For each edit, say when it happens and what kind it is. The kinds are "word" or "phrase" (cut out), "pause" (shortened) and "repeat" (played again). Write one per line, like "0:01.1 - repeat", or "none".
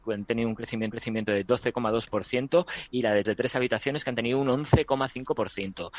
0:00.9 - repeat
0:03.2 - phrase